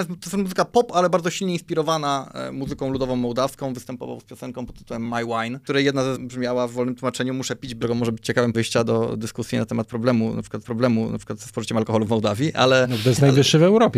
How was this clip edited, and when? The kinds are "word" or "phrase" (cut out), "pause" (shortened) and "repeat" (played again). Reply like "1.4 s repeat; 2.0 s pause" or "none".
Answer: 6.2 s word; 7.8 s phrase; 8.5 s word; 10.6 s repeat